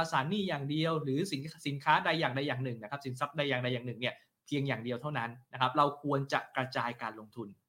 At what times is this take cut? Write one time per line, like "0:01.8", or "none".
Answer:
none